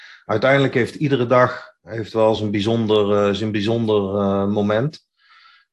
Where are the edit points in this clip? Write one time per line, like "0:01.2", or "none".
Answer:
none